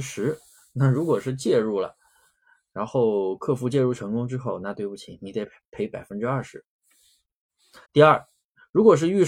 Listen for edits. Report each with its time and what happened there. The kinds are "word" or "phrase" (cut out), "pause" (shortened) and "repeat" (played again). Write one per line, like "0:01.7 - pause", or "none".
0:07.8 - pause